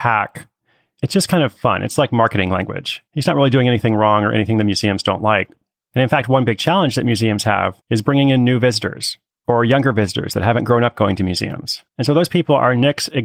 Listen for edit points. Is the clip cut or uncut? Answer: cut